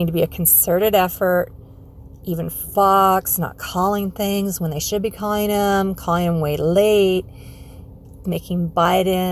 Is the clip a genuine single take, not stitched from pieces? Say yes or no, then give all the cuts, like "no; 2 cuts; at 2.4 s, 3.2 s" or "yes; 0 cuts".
no; 1 cut; at 8.2 s